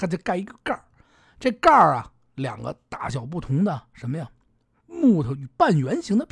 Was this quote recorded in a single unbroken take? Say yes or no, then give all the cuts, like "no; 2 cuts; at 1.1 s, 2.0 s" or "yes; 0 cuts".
yes; 0 cuts